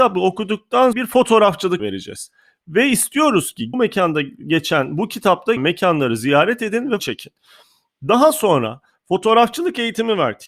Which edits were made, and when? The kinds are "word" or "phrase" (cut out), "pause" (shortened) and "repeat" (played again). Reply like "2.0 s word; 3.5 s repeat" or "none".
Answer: 0.9 s phrase; 1.8 s word; 3.7 s phrase; 5.6 s word; 7.0 s word